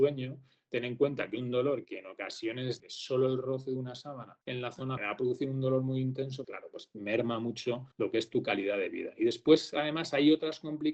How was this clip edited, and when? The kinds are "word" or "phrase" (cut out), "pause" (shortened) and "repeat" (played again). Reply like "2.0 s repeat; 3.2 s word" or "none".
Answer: 1.8 s word; 2.8 s phrase; 4.4 s pause; 5.0 s word; 6.4 s word; 7.9 s pause